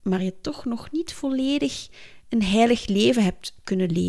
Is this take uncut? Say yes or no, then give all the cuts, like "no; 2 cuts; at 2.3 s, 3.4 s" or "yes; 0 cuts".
yes; 0 cuts